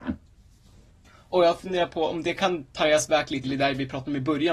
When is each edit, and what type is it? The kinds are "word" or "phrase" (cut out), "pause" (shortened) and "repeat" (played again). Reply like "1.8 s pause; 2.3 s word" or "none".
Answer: 3.4 s word